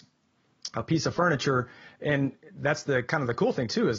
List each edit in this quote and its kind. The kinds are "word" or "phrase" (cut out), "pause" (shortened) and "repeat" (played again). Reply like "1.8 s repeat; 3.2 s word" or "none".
none